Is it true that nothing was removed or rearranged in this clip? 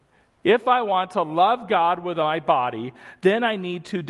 yes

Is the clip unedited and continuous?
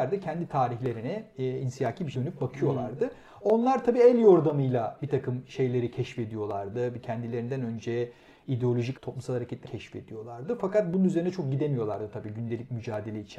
no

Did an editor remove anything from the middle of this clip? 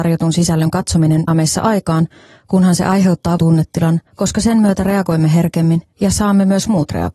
yes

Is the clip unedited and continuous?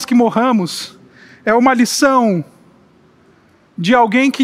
yes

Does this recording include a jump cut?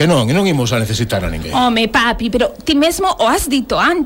no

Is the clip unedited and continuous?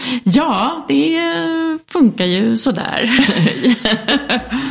yes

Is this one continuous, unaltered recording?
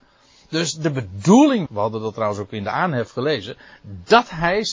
no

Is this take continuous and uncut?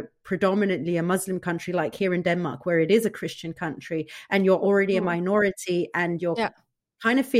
yes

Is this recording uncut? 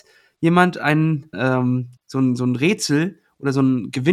no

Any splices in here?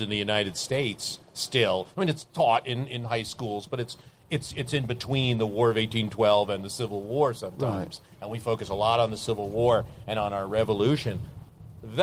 no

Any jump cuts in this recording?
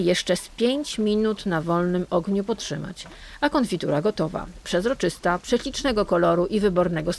no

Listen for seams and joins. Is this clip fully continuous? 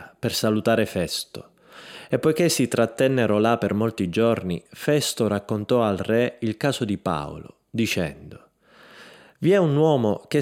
yes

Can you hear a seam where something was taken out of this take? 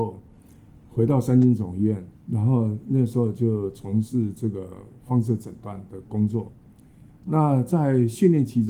yes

